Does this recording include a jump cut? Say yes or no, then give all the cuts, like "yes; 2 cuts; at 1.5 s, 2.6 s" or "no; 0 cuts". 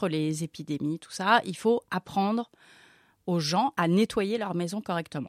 no; 0 cuts